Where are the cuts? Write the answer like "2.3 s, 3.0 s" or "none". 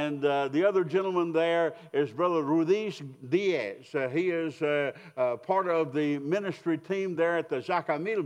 none